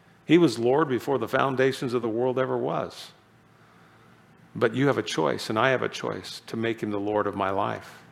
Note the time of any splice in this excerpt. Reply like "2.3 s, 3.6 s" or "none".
none